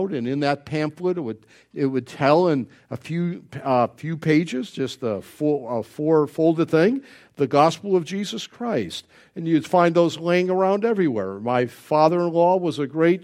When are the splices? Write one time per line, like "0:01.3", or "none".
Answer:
none